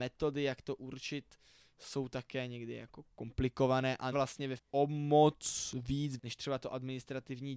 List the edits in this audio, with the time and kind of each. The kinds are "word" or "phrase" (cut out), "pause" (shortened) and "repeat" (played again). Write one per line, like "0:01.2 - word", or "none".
0:04.1 - word
0:04.6 - word
0:06.2 - word